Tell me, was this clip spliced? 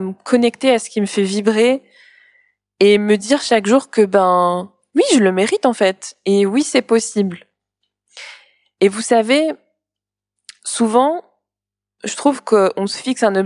no; 0 cuts

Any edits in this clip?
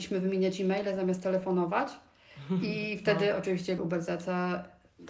yes; 1 cut; at 3.8 s

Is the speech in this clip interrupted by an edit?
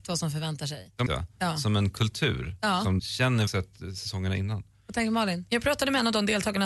yes; 3 cuts; at 1.1 s, 3.0 s, 3.5 s

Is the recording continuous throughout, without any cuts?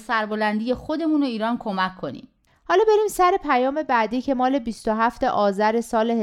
yes; 0 cuts

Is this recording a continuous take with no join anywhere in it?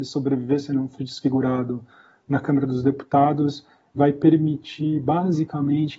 no; 2 cuts; at 1.0 s, 4.0 s

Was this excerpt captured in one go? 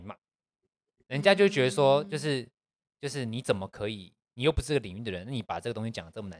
yes; 0 cuts

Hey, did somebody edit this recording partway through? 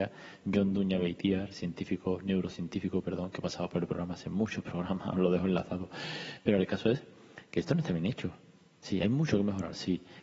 no; 0 cuts

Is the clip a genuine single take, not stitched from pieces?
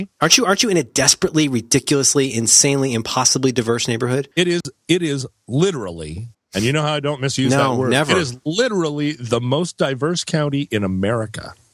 no; 2 cuts; at 4.3 s, 6.3 s

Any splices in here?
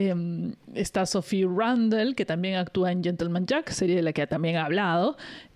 no; 0 cuts

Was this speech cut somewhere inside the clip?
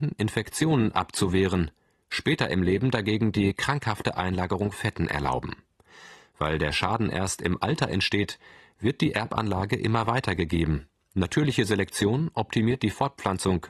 yes; 1 cut; at 4.7 s

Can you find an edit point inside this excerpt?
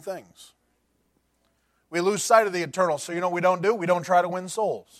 no; 0 cuts

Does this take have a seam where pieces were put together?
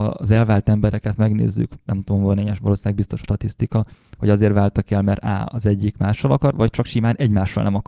yes; 2 cuts; at 3.2 s, 6.5 s

